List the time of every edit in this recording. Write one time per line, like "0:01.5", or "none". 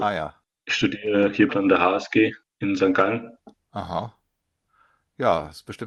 0:01.5
0:02.4